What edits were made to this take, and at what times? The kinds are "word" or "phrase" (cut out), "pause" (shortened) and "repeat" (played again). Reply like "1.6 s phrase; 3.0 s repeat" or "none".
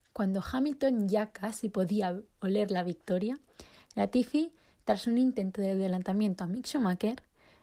none